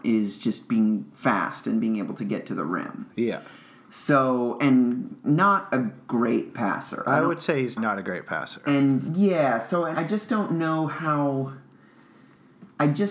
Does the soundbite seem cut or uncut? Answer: cut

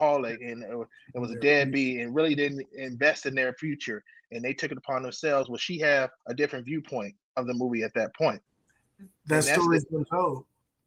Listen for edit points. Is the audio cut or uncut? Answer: cut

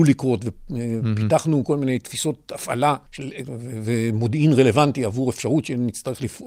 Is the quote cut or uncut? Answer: cut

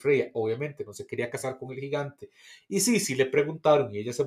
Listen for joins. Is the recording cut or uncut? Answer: uncut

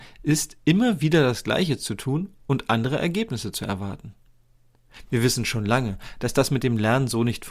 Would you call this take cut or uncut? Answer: uncut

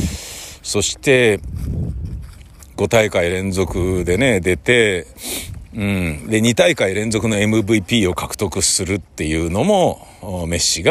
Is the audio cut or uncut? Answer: uncut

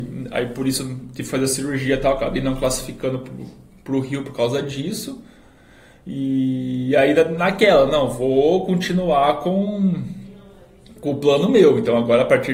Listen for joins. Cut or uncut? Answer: uncut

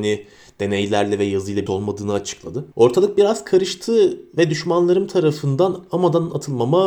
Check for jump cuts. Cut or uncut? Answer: cut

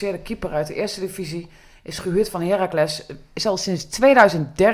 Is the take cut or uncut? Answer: uncut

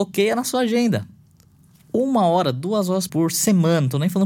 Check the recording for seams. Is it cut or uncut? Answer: cut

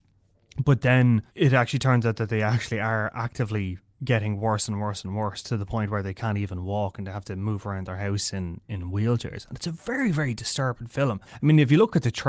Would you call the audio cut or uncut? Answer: cut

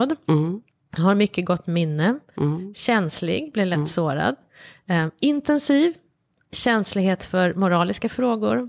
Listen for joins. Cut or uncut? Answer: uncut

